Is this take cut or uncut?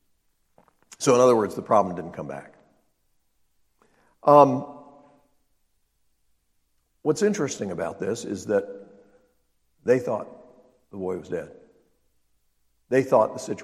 uncut